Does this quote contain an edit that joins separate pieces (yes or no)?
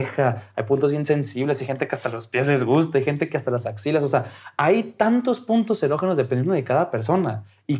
no